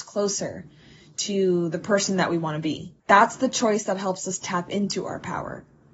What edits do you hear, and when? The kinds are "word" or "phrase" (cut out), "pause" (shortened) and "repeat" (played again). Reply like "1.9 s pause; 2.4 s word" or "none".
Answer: 3.0 s pause